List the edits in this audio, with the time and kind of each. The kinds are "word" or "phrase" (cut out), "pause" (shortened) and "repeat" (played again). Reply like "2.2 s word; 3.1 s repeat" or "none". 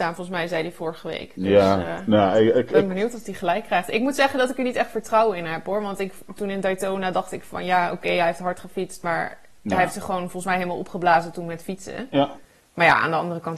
none